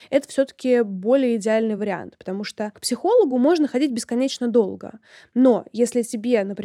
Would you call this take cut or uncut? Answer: uncut